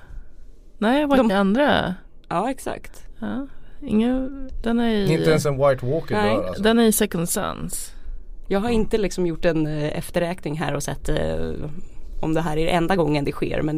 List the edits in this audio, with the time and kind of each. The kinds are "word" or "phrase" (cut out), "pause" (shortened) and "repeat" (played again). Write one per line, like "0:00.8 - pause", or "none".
0:01.3 - phrase